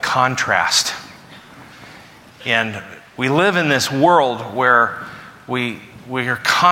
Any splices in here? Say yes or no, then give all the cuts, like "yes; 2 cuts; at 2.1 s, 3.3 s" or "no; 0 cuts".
no; 0 cuts